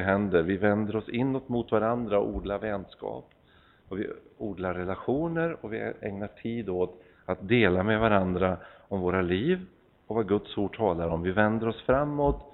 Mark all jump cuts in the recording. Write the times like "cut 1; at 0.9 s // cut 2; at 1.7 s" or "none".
none